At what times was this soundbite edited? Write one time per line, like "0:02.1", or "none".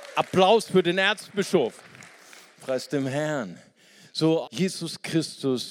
0:04.5